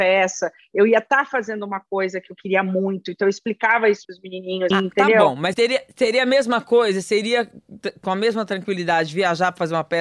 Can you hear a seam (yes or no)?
yes